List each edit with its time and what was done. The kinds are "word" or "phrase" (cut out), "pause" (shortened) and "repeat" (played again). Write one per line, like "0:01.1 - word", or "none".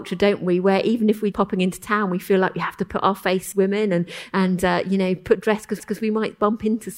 0:01.3 - word
0:03.5 - phrase
0:05.8 - repeat